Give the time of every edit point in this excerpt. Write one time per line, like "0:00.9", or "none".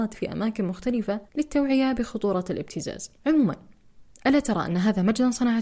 0:01.3
0:03.2